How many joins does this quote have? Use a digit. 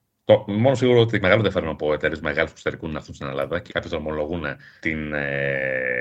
2